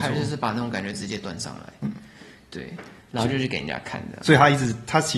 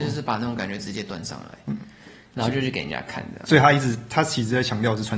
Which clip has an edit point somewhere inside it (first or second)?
second